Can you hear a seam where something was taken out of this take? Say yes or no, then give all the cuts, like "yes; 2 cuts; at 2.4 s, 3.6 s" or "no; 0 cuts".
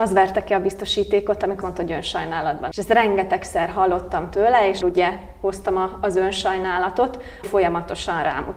yes; 4 cuts; at 1.6 s, 2.7 s, 4.8 s, 7.4 s